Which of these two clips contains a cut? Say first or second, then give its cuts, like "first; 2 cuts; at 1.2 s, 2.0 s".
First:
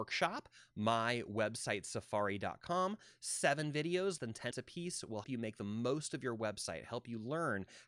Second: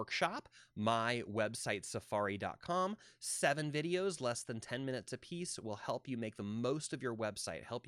first; 3 cuts; at 4.2 s, 4.5 s, 5.2 s